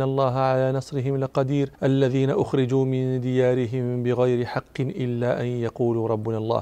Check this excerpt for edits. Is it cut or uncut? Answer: cut